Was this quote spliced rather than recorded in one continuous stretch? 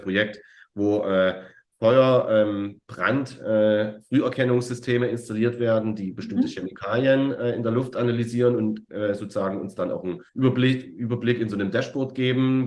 yes; 1 cut; at 10.3 s

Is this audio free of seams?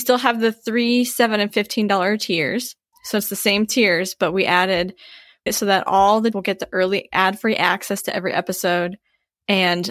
no; 3 cuts; at 2.9 s, 5.5 s, 6.3 s

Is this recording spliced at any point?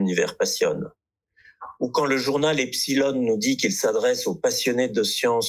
no; 0 cuts

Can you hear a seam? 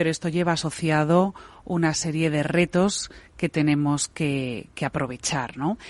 no; 0 cuts

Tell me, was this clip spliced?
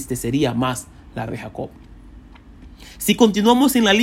yes; 1 cut; at 1.3 s

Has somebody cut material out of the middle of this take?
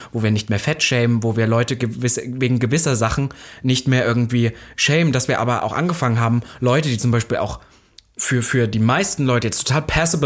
no; 0 cuts

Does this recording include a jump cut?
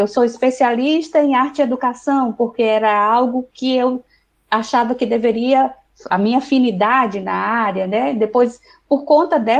yes; 1 cut; at 6.1 s

